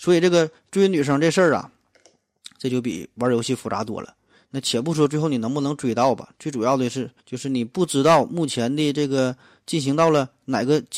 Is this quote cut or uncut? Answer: cut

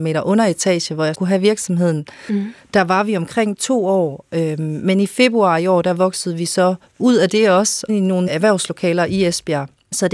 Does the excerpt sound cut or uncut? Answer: cut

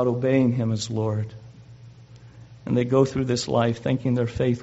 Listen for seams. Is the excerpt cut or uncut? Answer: uncut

